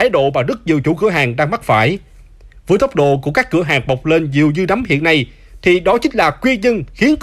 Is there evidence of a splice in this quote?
no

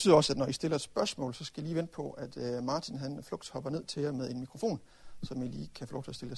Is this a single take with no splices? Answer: yes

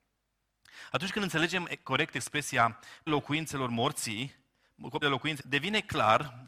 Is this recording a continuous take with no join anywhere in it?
no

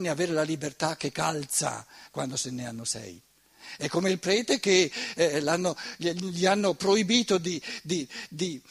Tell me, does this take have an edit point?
no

